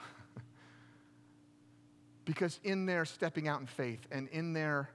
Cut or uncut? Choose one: uncut